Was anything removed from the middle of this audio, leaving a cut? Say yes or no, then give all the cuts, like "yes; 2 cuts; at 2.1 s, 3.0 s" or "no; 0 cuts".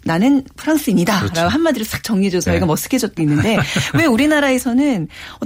yes; 2 cuts; at 2.5 s, 3.2 s